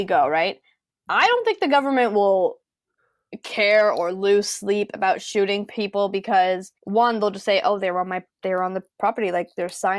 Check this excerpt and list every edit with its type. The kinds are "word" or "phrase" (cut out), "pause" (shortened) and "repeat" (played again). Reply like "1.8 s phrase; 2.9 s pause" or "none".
6.8 s pause